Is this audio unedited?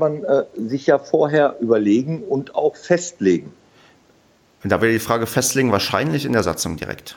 yes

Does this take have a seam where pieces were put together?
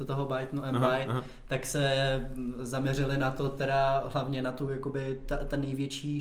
no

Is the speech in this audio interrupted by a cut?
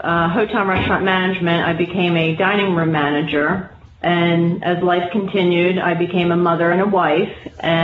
no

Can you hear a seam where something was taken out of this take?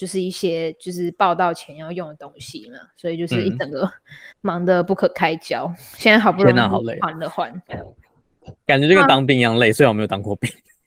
yes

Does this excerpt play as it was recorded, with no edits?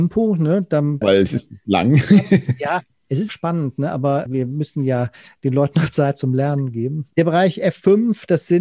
no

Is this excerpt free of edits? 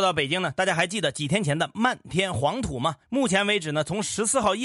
no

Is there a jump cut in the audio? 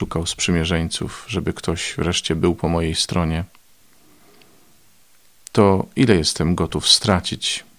no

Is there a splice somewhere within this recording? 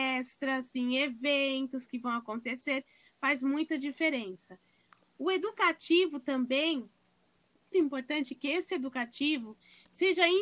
yes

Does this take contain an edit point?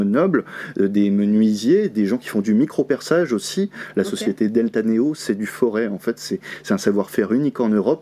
no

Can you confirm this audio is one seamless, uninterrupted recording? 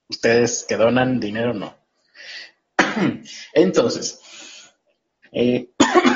yes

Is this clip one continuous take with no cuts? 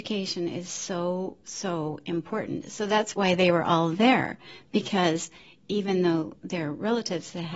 yes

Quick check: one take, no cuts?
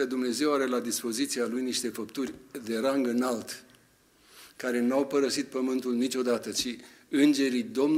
yes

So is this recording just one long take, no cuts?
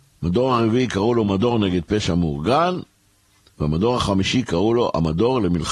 yes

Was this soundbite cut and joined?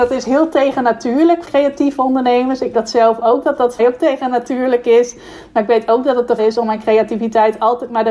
yes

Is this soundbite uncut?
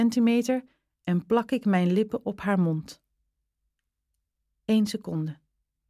yes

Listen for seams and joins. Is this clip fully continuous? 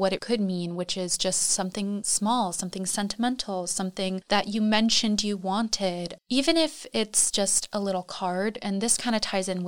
yes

